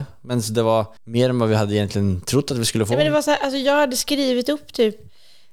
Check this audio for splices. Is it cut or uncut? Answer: cut